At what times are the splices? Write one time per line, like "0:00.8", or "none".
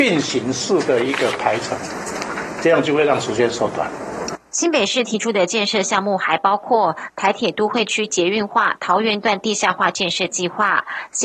0:04.5